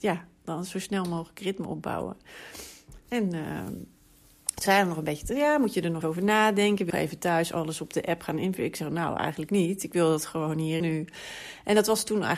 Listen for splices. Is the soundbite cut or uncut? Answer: cut